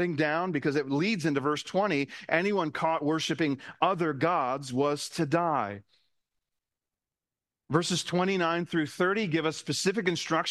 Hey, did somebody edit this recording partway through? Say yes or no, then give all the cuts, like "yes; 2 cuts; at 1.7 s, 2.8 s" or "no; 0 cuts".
no; 0 cuts